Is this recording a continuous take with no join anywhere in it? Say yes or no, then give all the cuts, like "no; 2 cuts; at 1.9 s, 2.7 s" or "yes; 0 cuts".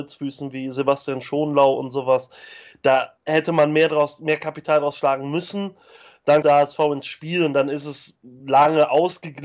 no; 2 cuts; at 3.2 s, 6.4 s